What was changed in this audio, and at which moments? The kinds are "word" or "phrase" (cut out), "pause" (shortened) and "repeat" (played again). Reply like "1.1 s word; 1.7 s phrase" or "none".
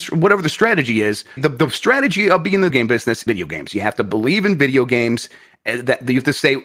1.4 s word; 2.7 s word; 3.3 s phrase

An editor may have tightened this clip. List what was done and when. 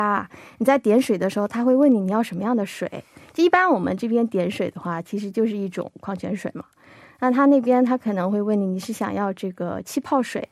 none

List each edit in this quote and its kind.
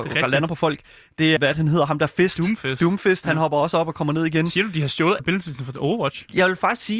1.4 s word; 5.2 s word

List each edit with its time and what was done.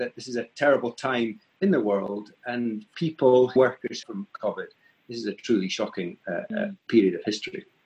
2.9 s word; 3.6 s word; 4.0 s phrase

